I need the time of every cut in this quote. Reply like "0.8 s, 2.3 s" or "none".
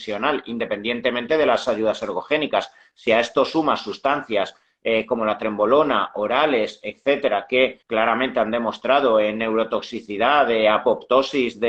7.8 s